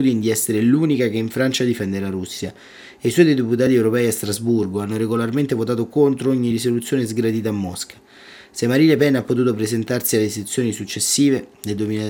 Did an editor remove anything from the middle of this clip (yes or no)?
no